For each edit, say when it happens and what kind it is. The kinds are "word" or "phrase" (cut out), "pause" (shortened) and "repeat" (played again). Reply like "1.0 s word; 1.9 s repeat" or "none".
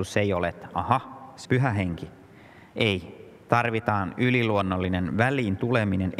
1.4 s word